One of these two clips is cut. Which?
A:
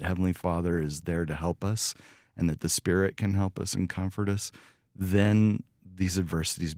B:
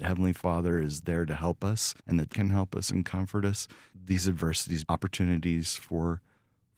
B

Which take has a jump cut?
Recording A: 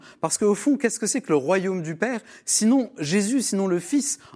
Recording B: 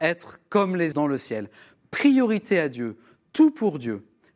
B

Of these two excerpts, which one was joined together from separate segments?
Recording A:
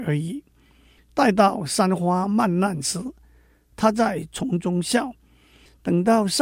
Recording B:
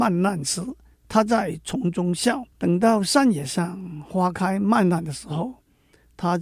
B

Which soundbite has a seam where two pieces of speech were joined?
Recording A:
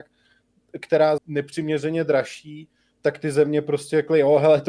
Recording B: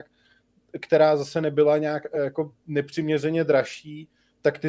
A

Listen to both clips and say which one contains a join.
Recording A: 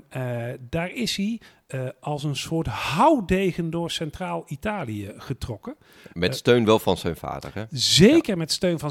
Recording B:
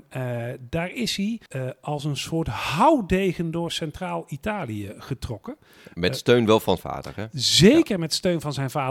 B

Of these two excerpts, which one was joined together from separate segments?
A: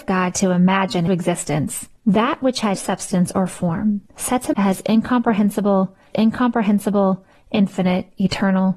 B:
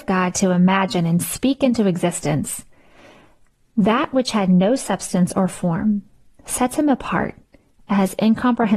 A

